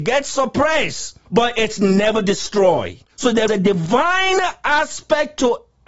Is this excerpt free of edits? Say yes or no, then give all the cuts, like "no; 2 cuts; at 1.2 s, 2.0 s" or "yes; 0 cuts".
no; 3 cuts; at 1.3 s, 3.1 s, 3.5 s